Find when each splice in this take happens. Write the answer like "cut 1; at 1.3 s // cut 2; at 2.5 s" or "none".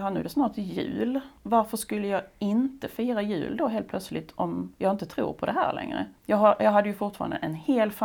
cut 1; at 1.4 s // cut 2; at 4.7 s // cut 3; at 6.2 s